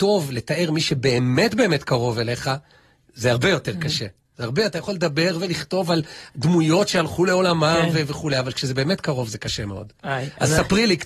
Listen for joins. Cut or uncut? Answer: uncut